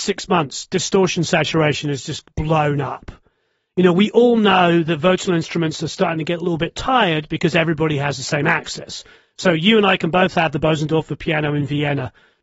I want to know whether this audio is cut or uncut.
uncut